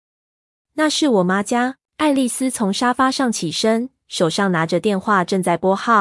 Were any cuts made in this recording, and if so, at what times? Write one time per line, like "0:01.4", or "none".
0:01.9